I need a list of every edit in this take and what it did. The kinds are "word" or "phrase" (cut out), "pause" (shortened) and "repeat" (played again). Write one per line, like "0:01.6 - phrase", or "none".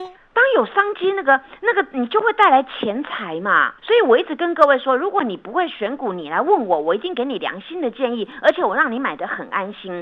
0:03.8 - pause